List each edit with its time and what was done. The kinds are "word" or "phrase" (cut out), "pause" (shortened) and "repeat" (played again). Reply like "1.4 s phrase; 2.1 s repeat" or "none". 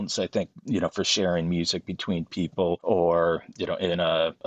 none